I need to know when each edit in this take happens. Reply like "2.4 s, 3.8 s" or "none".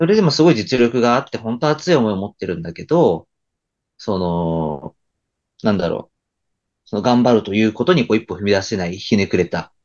none